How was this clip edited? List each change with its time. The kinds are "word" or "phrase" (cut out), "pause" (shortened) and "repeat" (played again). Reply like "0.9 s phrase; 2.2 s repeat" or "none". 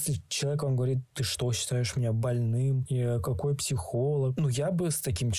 1.1 s pause